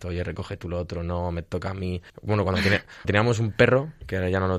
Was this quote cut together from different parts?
yes; 2 cuts; at 2.1 s, 3.0 s

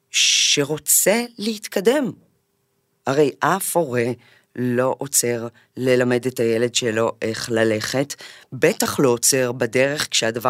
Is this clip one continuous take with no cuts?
yes; 0 cuts

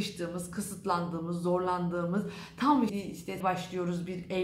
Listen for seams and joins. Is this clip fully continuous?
no; 2 cuts; at 2.9 s, 3.4 s

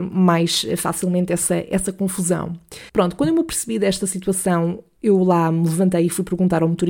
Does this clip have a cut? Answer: yes; 1 cut; at 2.9 s

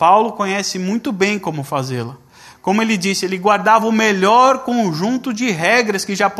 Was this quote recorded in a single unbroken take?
yes; 0 cuts

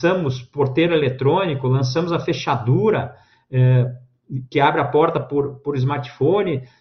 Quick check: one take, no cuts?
yes; 0 cuts

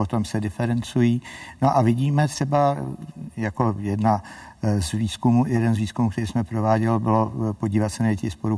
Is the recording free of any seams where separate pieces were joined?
yes; 0 cuts

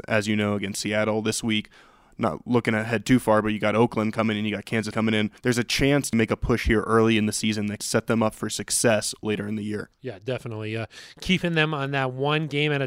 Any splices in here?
yes; 5 cuts; at 4.9 s, 5.4 s, 6.1 s, 7.8 s, 9.9 s

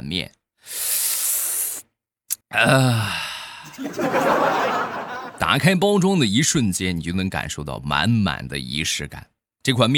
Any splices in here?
yes; 1 cut; at 2.4 s

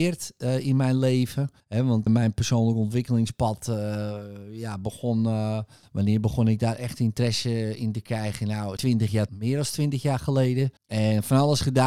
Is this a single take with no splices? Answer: no; 6 cuts; at 1.6 s, 2.1 s, 5.8 s, 8.8 s, 9.3 s, 10.8 s

